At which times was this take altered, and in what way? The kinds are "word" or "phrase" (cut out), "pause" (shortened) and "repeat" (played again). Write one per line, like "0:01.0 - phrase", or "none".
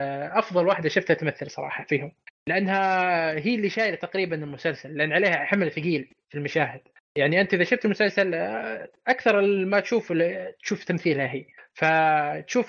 none

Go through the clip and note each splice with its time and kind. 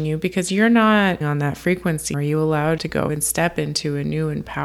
0:01.2 - word
0:02.1 - word
0:02.8 - word
0:03.1 - word

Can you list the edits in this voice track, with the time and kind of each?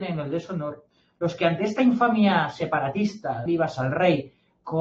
0:03.5 - word

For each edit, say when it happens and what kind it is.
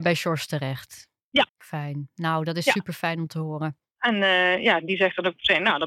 0:01.5 - pause

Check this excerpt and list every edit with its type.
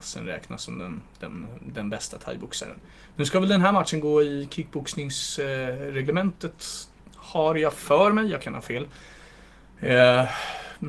none

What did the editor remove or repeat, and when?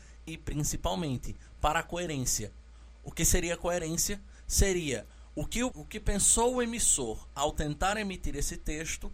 0:05.7 - word

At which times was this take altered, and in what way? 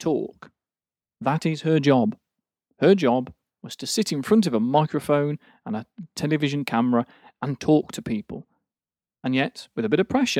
none

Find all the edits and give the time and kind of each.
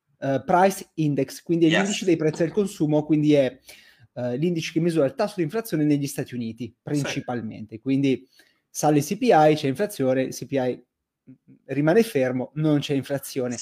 none

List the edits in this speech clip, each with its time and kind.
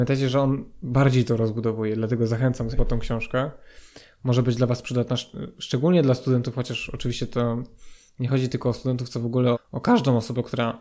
0:02.8 - word
0:09.5 - word

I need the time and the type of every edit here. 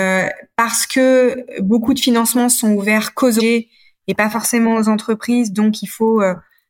0:03.4 - word

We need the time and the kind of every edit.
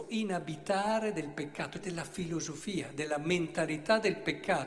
0:01.8 - word

